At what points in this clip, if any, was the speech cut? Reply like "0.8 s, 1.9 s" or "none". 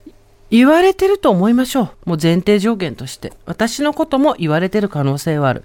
1.9 s